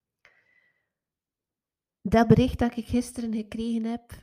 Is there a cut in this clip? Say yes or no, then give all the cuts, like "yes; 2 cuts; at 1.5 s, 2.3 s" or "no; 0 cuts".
no; 0 cuts